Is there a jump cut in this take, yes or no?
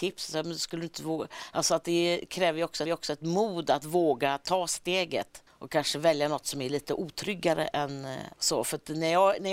yes